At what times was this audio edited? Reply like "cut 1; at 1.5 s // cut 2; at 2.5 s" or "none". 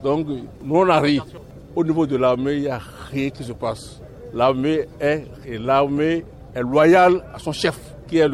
cut 1; at 5.4 s